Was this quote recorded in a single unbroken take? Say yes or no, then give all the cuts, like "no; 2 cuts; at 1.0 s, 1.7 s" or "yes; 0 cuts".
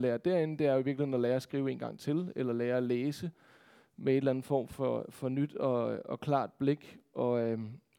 yes; 0 cuts